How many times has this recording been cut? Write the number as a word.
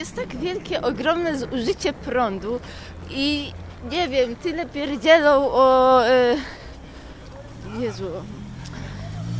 zero